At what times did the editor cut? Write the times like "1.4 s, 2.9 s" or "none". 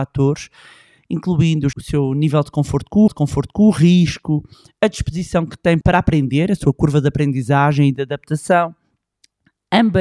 1.7 s, 3.1 s, 5.8 s